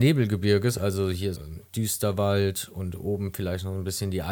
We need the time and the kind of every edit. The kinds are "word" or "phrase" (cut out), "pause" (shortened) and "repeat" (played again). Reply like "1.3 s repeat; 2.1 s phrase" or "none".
1.4 s word

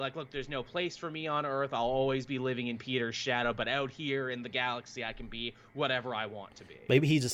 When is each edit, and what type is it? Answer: none

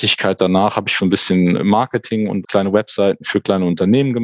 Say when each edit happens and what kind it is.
1.0 s word; 1.6 s word; 2.4 s word

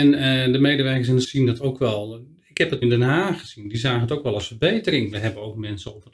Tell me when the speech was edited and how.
1.2 s word; 2.8 s word

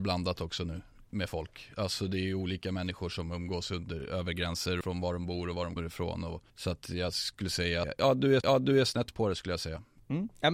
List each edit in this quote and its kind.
4.8 s word; 5.8 s word; 6.5 s pause; 7.8 s phrase; 8.4 s repeat

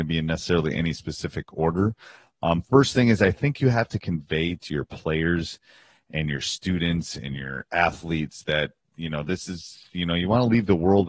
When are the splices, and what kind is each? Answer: none

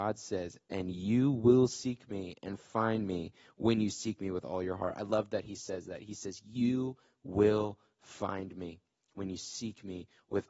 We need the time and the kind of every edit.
none

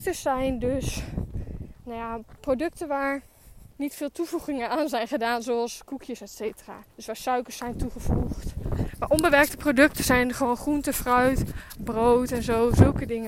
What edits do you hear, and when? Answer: 3.7 s pause; 6.9 s pause

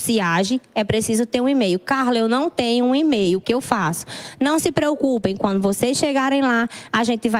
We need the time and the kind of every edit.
3.4 s word

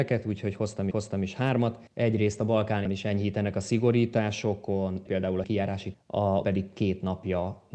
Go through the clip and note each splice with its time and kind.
0.9 s repeat; 1.9 s pause; 2.9 s word; 5.1 s word; 5.4 s word; 5.9 s word; 6.4 s word

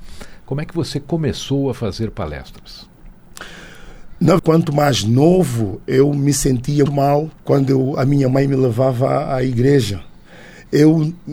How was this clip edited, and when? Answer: 4.4 s phrase; 6.9 s word; 7.4 s pause

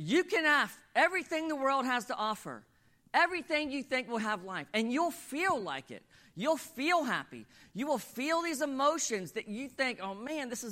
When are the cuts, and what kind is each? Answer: none

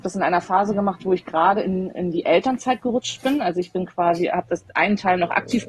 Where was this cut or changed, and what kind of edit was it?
none

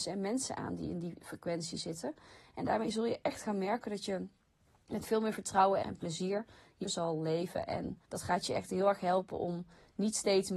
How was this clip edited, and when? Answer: 5.8 s word; 6.8 s word; 8.0 s pause

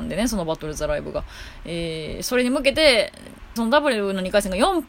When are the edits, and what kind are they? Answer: 3.6 s word

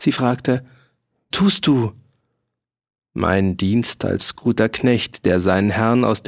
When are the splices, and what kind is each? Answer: 1.3 s phrase

